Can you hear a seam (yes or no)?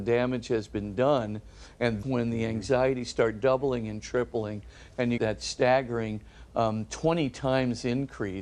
yes